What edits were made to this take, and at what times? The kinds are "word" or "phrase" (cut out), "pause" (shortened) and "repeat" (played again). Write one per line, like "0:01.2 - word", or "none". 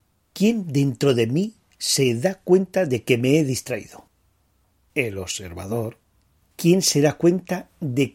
none